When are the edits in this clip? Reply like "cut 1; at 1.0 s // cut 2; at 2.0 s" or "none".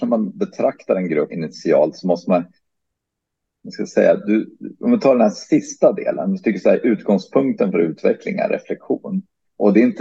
cut 1; at 1.3 s